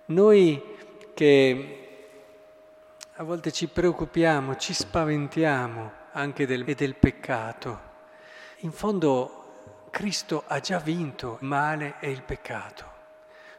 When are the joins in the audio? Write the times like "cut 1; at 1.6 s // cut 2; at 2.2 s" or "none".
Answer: cut 1; at 6.6 s // cut 2; at 8.5 s // cut 3; at 11.4 s